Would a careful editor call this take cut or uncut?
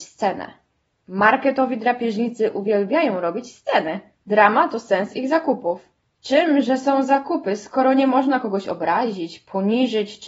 uncut